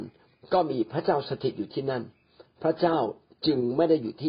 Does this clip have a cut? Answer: no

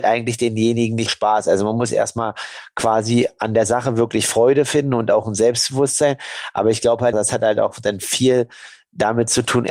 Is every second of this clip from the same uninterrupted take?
no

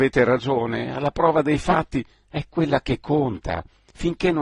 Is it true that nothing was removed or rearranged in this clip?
yes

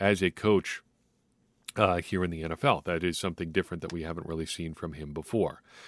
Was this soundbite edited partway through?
no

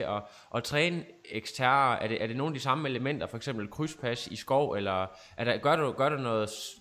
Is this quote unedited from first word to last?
yes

